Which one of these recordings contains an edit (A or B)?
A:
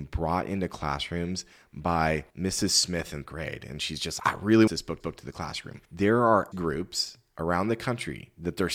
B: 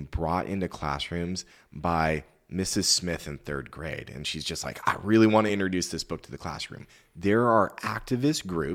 A